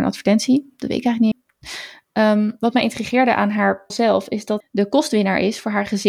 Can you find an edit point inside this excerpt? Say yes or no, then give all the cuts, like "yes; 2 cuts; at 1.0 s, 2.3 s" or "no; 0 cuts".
yes; 3 cuts; at 1.3 s, 3.9 s, 4.6 s